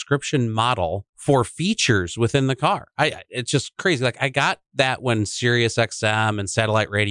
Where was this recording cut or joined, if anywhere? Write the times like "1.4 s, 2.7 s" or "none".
1.1 s, 4.6 s